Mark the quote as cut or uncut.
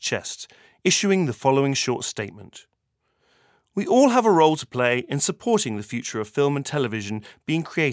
uncut